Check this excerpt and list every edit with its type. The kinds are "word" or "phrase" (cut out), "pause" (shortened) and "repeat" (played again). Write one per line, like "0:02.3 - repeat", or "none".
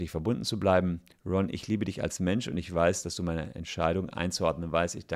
none